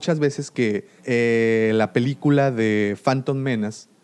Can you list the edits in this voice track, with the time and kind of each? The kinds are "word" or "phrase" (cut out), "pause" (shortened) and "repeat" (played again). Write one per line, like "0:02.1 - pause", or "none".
0:01.0 - pause